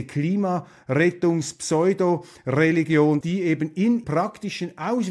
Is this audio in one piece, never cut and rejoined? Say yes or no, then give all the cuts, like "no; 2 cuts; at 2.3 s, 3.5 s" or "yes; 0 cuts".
no; 2 cuts; at 3.2 s, 4.0 s